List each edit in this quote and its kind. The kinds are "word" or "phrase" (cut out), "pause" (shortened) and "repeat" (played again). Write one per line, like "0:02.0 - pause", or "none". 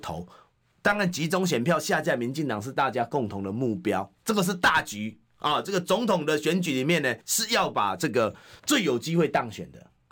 0:07.2 - pause
0:08.6 - pause